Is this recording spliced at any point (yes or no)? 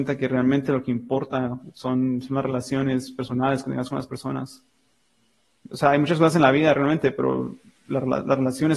no